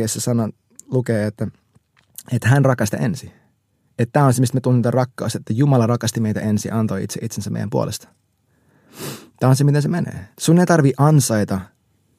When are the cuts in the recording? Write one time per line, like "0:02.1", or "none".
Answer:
0:02.9
0:10.3